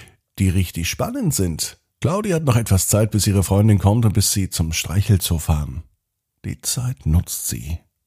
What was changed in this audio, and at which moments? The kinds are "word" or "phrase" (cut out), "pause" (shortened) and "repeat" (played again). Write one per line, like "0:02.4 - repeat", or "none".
0:01.9 - pause

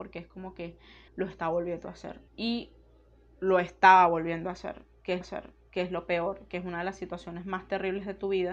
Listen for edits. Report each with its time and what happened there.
0:01.1 - pause
0:02.3 - pause
0:05.2 - repeat

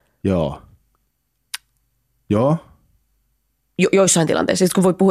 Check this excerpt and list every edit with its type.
none

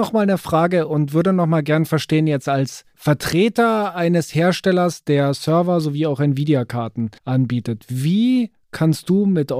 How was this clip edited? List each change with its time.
0:07.2 - pause

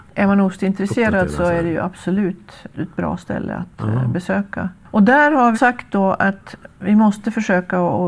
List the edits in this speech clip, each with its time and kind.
0:02.7 - word
0:05.5 - word

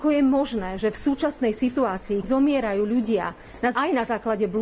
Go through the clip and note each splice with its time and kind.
0:02.2 - word
0:03.7 - word

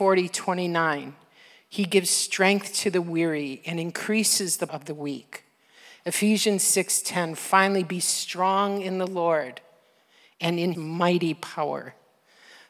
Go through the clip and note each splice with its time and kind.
0:04.7 - word
0:10.7 - word

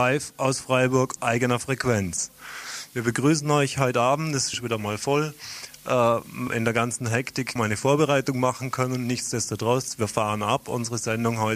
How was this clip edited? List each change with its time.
0:01.2 - phrase
0:04.5 - word
0:06.5 - word
0:07.6 - word

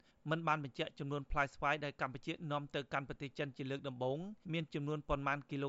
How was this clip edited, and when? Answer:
0:04.4 - pause

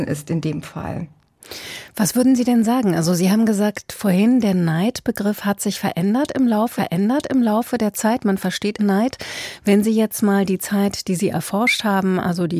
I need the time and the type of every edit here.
0:06.8 - repeat
0:08.8 - phrase

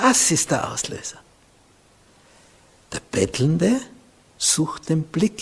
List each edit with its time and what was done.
none

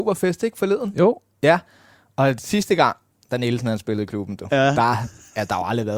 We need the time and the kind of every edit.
none

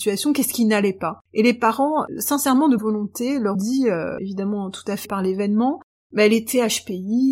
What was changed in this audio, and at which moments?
0:01.2 - pause
0:02.8 - word
0:03.5 - word
0:05.0 - word
0:06.0 - pause

